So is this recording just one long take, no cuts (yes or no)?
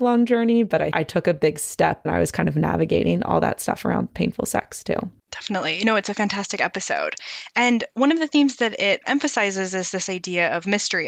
no